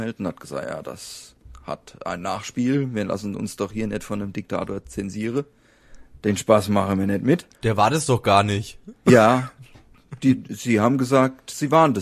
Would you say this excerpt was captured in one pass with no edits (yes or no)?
no